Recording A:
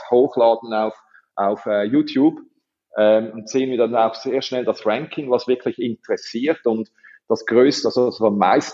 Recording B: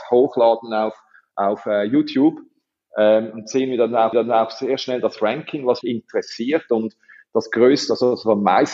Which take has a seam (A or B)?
B